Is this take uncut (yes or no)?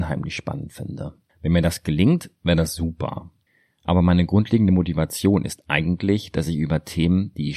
no